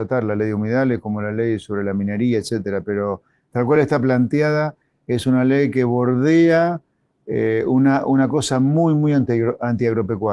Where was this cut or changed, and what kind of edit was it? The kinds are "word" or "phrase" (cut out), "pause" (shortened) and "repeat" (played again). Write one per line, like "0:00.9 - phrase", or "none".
none